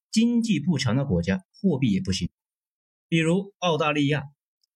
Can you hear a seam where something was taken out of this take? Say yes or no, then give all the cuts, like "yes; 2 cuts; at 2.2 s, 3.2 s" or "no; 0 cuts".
yes; 1 cut; at 1.5 s